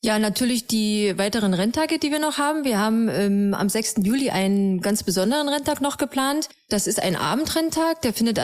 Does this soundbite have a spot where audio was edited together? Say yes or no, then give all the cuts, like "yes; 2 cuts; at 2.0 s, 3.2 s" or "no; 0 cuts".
no; 0 cuts